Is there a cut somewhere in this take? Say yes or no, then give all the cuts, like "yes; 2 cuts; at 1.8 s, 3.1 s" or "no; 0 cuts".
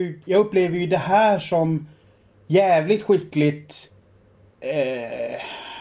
no; 0 cuts